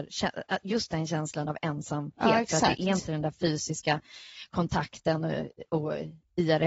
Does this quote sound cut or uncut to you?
uncut